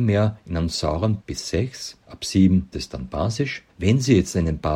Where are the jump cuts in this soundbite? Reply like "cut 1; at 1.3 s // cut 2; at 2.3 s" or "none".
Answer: cut 1; at 1.2 s // cut 2; at 2.0 s // cut 3; at 2.7 s // cut 4; at 3.7 s